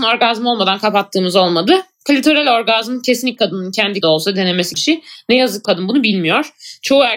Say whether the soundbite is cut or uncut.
cut